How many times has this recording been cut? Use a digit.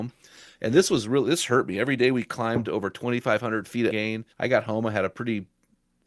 2